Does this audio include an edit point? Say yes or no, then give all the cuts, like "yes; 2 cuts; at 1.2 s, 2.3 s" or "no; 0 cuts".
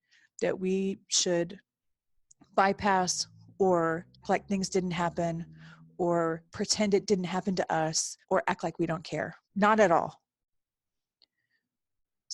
yes; 4 cuts; at 4.2 s, 6.5 s, 8.2 s, 9.4 s